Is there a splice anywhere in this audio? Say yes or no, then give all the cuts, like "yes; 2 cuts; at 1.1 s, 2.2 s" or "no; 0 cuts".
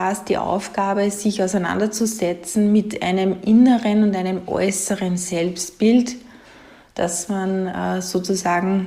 no; 0 cuts